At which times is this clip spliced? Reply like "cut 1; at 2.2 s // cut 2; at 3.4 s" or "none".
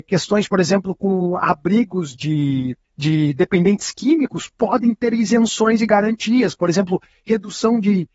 cut 1; at 2.1 s // cut 2; at 2.8 s